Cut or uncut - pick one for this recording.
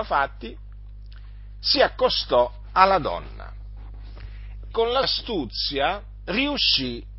cut